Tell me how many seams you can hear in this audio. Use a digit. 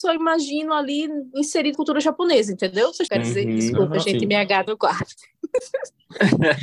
3